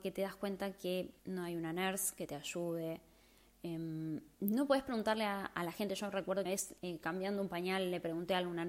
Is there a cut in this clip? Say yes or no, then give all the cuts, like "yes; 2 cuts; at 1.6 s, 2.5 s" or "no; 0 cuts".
yes; 4 cuts; at 1.2 s, 4.3 s, 6.5 s, 6.8 s